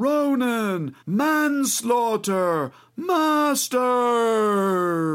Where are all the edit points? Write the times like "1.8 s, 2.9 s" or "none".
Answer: 1.0 s